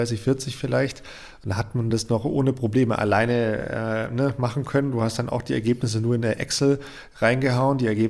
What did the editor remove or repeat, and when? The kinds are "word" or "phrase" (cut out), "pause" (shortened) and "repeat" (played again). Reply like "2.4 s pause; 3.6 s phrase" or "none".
none